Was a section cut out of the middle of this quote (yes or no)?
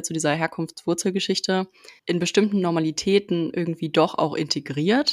yes